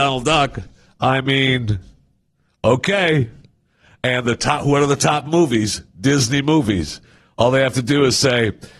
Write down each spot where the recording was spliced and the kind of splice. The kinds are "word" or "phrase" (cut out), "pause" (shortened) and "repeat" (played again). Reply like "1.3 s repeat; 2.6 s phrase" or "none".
none